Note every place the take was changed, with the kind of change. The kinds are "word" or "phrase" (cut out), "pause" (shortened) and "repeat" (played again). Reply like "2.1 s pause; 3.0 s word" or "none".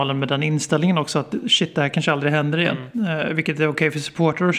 none